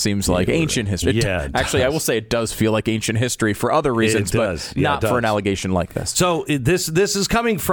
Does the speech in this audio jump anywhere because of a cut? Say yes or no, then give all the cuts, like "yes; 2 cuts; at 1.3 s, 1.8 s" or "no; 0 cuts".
no; 0 cuts